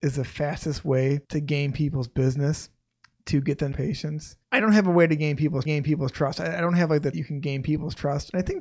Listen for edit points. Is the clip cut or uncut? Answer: cut